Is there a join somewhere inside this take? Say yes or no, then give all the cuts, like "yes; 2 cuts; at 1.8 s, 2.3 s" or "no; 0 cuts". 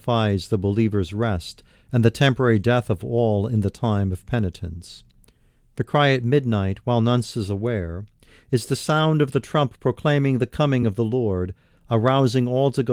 no; 0 cuts